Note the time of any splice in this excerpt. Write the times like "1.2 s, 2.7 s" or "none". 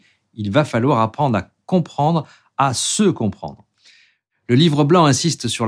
none